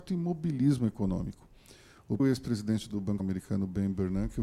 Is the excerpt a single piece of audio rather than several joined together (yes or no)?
no